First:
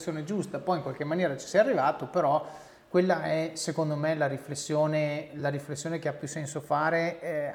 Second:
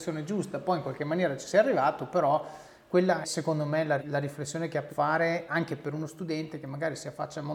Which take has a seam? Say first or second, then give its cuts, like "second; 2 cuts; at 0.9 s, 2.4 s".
second; 4 cuts; at 3.2 s, 4.0 s, 4.9 s, 5.5 s